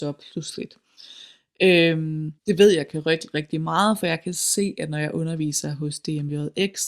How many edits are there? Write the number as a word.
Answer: one